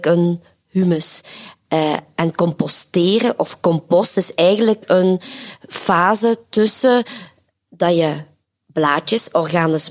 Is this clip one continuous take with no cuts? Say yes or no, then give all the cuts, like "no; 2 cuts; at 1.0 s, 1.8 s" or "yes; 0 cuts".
yes; 0 cuts